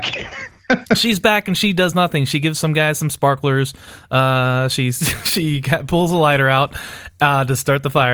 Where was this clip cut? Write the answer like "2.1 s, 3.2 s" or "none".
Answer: none